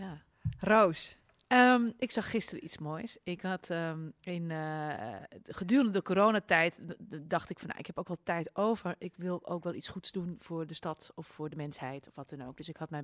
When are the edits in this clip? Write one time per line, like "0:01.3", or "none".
none